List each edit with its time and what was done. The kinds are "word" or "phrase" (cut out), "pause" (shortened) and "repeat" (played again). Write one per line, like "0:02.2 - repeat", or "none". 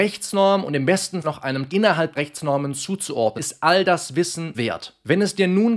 0:01.2 - word
0:01.7 - word
0:02.2 - word
0:03.4 - word
0:04.5 - word